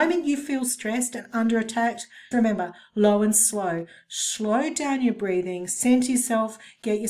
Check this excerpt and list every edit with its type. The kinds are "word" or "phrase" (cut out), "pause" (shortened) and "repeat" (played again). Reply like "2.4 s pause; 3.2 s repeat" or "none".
2.3 s word